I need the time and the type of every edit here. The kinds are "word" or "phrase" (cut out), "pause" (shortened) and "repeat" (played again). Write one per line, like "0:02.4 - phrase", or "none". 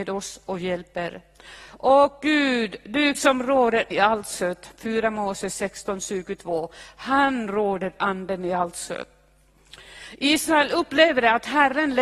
0:03.1 - word
0:03.9 - phrase
0:08.0 - word